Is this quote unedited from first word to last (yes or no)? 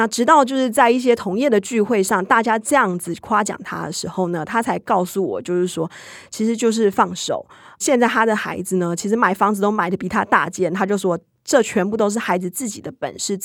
yes